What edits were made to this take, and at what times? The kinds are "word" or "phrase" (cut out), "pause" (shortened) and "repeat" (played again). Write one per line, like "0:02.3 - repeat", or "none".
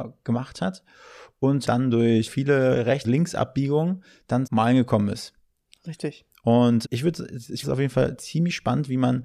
0:01.7 - word
0:02.3 - word
0:03.0 - word
0:04.5 - word
0:06.8 - word
0:07.6 - word